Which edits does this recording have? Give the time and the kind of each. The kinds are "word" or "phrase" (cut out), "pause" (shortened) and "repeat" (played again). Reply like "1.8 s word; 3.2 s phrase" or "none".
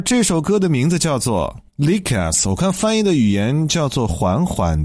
1.7 s pause